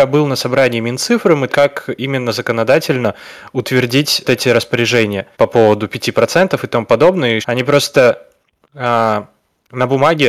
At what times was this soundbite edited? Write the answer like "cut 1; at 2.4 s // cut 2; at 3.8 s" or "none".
cut 1; at 1.5 s // cut 2; at 4.2 s // cut 3; at 5.3 s // cut 4; at 7.4 s